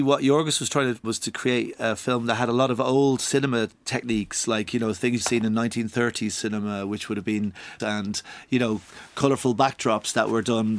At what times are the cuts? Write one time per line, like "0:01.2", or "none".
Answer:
0:01.0
0:03.7
0:05.2
0:07.8